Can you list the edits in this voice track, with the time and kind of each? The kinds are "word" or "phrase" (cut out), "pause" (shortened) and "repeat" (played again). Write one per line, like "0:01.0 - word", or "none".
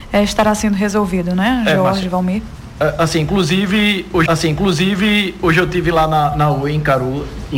0:04.3 - repeat